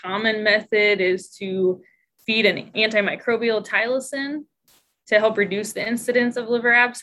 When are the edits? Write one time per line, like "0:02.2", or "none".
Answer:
0:02.7